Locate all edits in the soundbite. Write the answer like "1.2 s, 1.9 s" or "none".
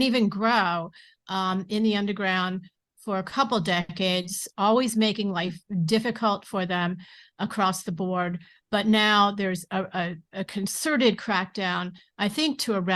none